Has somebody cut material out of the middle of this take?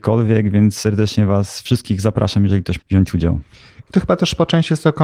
yes; 1 cut; at 2.8 s

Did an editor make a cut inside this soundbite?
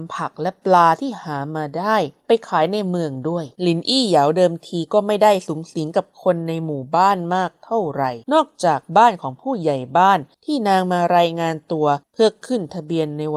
yes; 2 cuts; at 3.6 s, 8.2 s

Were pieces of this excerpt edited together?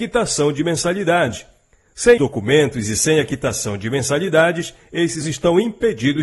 yes; 2 cuts; at 2.2 s, 5.2 s

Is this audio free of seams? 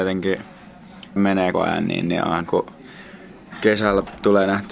no; 3 cuts; at 1.2 s, 1.5 s, 2.5 s

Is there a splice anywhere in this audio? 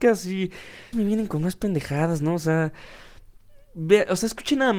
yes; 1 cut; at 0.9 s

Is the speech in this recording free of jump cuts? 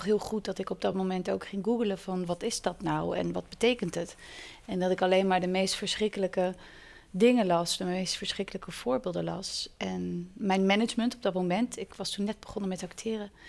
yes; 0 cuts

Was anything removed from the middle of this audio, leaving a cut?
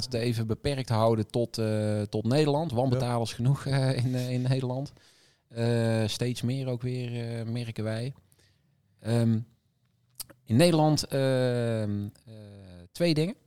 no; 0 cuts

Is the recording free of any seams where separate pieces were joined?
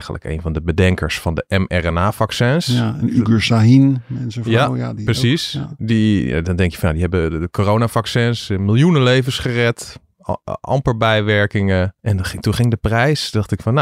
no; 1 cut; at 12.0 s

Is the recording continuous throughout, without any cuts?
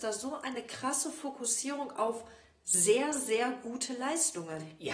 yes; 0 cuts

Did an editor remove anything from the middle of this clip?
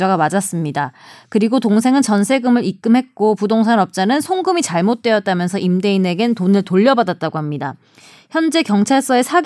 no; 0 cuts

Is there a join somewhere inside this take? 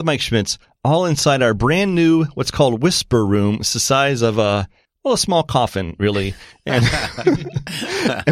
no; 0 cuts

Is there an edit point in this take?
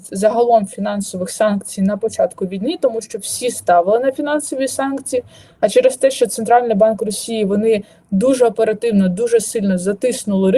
no; 0 cuts

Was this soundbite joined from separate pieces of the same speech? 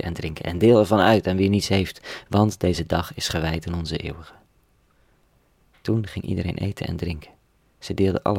no; 0 cuts

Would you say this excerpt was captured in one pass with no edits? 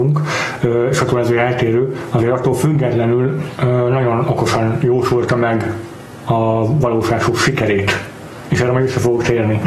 yes; 0 cuts

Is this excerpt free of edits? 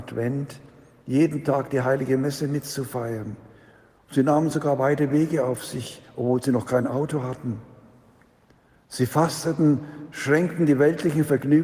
yes; 0 cuts

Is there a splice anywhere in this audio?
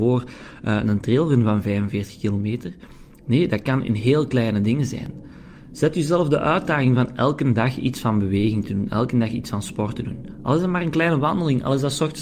no; 0 cuts

